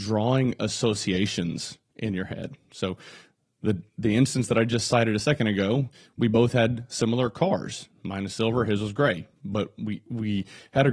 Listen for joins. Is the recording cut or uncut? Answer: uncut